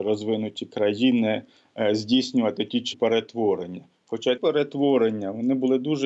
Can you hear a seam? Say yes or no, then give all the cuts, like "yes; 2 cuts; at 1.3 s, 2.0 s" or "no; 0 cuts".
yes; 2 cuts; at 2.9 s, 4.4 s